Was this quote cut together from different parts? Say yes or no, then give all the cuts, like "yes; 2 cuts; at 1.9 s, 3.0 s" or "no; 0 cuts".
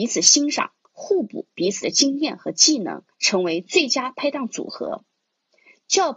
yes; 1 cut; at 3.1 s